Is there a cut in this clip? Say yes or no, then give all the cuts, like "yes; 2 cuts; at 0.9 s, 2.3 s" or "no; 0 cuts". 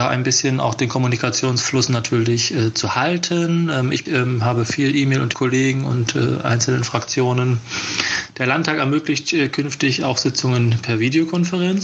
yes; 2 cuts; at 4.1 s, 5.3 s